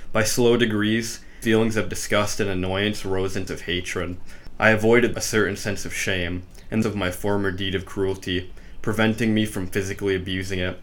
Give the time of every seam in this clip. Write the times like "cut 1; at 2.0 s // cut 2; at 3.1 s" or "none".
cut 1; at 1.4 s // cut 2; at 3.5 s // cut 3; at 5.1 s // cut 4; at 6.8 s